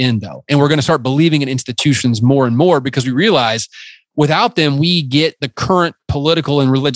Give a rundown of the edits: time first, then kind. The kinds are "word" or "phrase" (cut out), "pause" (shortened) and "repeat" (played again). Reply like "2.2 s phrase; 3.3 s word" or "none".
none